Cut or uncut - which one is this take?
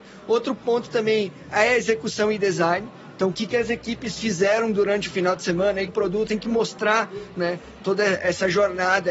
cut